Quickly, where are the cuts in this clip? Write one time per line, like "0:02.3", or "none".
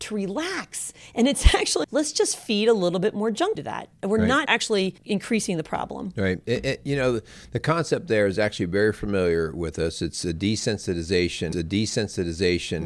0:01.8
0:03.6
0:04.5
0:05.0
0:11.5